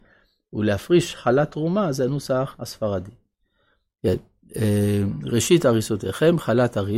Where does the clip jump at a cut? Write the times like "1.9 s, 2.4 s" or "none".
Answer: none